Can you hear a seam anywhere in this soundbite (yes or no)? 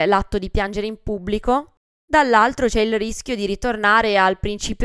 no